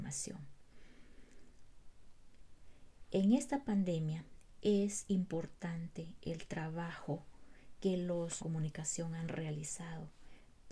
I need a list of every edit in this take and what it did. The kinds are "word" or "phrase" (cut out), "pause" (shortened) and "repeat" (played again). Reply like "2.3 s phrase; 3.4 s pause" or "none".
8.4 s phrase